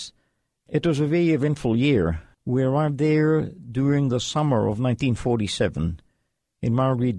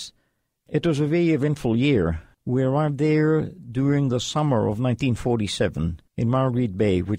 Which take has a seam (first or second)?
second